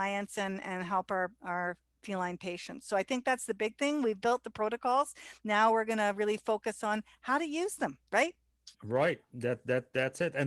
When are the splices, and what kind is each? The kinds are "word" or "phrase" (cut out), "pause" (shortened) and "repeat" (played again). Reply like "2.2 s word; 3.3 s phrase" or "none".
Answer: 8.7 s pause